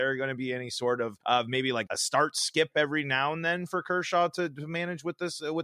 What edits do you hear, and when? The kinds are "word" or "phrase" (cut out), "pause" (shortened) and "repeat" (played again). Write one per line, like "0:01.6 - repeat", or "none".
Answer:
0:01.2 - pause
0:01.9 - word
0:03.7 - word